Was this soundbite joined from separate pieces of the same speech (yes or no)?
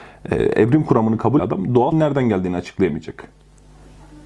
yes